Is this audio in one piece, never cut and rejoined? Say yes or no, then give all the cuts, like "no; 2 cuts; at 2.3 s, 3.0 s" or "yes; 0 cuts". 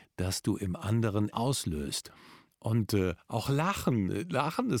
no; 1 cut; at 1.3 s